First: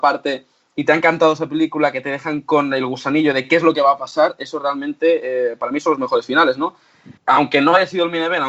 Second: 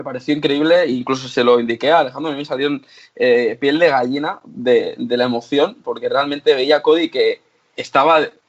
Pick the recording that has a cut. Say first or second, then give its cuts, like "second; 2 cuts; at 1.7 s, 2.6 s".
first; 1 cut; at 7.2 s